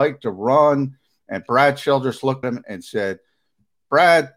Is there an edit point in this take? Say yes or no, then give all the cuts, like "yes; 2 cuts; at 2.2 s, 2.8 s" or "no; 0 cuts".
yes; 1 cut; at 2.4 s